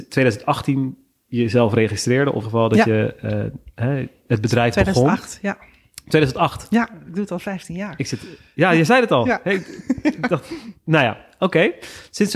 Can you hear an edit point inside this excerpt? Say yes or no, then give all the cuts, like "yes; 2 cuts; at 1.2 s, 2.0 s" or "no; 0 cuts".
yes; 1 cut; at 2.4 s